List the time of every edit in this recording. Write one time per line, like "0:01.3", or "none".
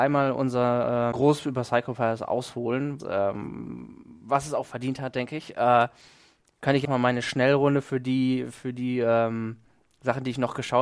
0:01.1
0:03.0
0:06.8